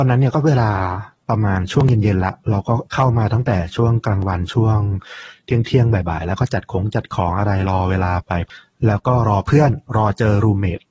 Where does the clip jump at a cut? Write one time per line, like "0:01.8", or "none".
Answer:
0:02.9

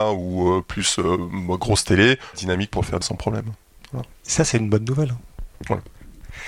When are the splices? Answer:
0:02.3
0:03.0
0:04.1

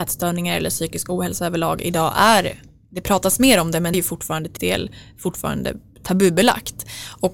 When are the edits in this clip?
0:03.9
0:04.6

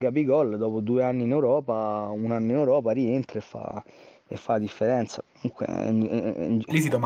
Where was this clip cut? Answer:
none

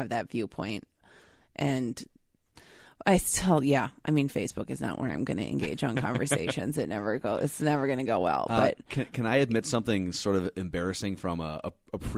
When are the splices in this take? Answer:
none

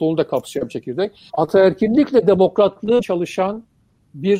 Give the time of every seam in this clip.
0:01.3
0:03.0

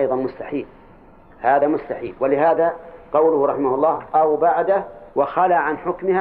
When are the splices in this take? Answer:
0:05.1

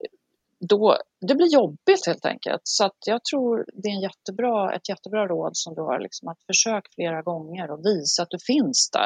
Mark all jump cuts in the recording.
0:01.1

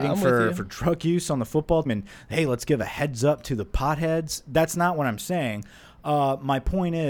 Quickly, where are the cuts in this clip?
0:01.9

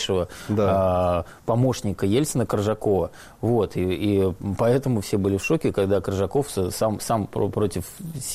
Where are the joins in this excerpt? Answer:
none

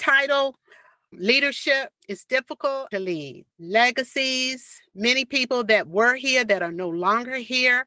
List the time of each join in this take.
0:01.1
0:02.0
0:02.9
0:03.5

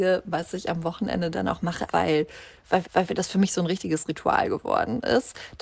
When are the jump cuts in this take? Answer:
0:01.9
0:02.8

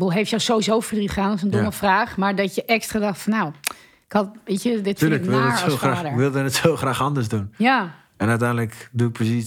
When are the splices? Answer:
none

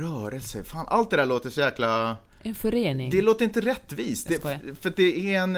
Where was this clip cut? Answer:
none

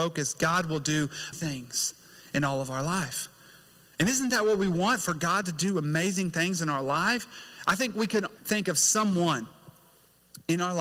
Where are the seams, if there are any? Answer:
0:01.3
0:08.4

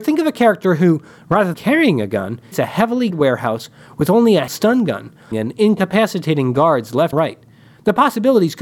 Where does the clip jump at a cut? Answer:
0:01.5
0:02.5
0:03.1
0:04.5
0:05.3
0:07.1

